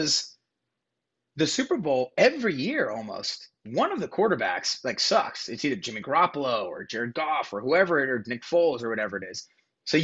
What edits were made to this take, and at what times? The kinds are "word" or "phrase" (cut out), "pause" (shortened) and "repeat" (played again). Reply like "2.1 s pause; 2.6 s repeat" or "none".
none